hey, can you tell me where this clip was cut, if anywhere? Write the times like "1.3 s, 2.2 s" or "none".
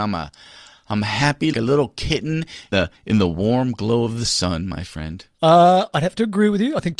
1.5 s, 2.7 s, 5.3 s